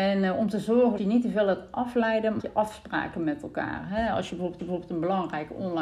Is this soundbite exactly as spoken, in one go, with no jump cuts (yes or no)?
no